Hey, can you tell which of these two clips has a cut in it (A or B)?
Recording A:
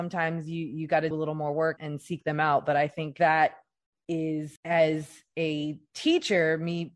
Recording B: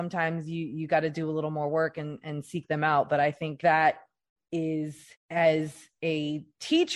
A